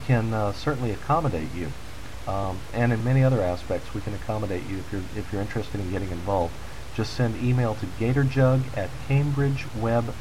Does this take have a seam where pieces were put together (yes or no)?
no